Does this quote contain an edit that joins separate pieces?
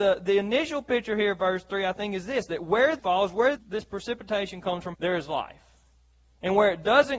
yes; 3 cuts; at 3.0 s, 3.6 s, 4.9 s

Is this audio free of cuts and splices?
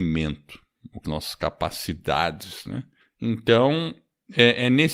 no; 2 cuts; at 1.0 s, 3.0 s

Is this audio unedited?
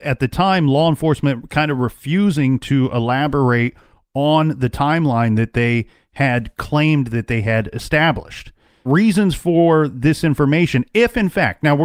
no; 1 cut; at 8.9 s

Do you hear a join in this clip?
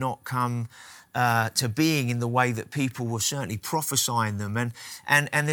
no; 0 cuts

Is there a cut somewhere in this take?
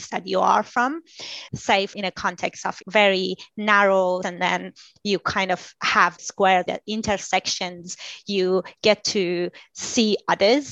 yes; 6 cuts; at 1.5 s, 1.9 s, 2.8 s, 4.2 s, 6.2 s, 6.7 s

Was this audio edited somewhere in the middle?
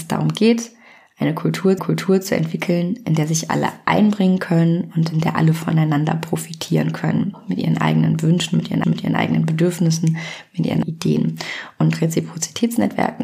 yes; 3 cuts; at 1.8 s, 8.8 s, 10.8 s

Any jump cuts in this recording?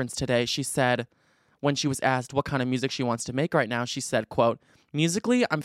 no; 0 cuts

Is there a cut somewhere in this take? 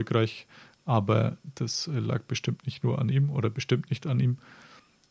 no; 0 cuts

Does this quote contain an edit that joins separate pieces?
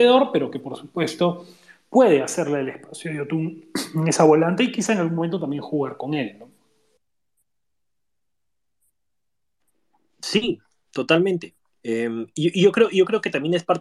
no; 0 cuts

